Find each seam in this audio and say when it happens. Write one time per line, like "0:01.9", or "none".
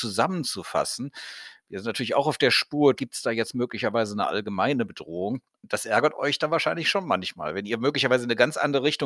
0:03.0
0:05.5